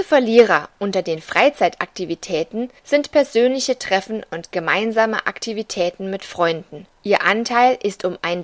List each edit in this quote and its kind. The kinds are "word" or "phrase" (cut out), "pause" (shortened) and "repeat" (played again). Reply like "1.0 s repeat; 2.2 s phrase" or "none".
2.8 s pause; 7.0 s pause